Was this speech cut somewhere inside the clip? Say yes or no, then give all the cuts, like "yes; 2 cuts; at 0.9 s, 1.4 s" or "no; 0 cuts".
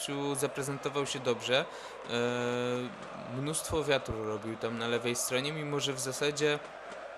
no; 0 cuts